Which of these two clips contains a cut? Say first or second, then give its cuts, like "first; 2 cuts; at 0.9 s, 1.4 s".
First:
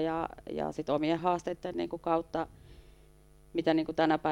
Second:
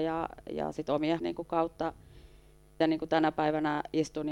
second; 2 cuts; at 1.2 s, 2.8 s